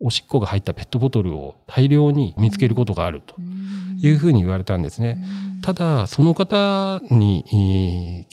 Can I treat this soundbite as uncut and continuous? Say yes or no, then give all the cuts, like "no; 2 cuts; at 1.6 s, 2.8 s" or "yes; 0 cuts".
no; 1 cut; at 2.4 s